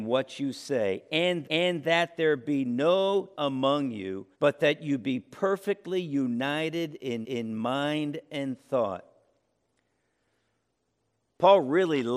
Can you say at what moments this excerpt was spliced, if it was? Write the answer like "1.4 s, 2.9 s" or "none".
1.4 s, 3.3 s, 4.3 s, 7.2 s